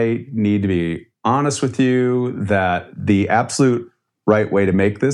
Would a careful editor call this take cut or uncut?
uncut